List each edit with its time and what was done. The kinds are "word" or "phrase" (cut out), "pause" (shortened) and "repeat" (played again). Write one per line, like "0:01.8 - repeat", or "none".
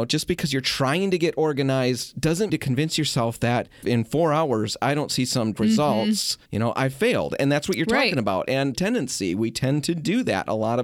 0:02.5 - phrase
0:03.8 - phrase
0:05.5 - word
0:06.5 - pause
0:08.7 - phrase